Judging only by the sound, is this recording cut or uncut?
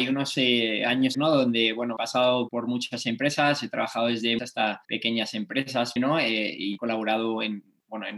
cut